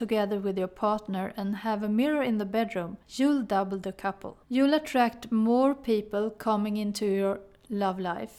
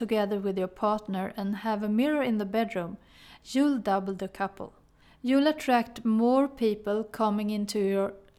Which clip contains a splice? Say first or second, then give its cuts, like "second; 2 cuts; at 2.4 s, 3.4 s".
first; 2 cuts; at 3.0 s, 4.4 s